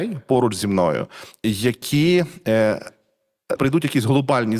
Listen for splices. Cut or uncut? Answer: cut